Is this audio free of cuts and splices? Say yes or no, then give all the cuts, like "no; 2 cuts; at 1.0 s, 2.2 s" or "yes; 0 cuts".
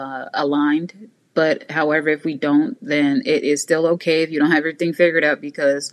yes; 0 cuts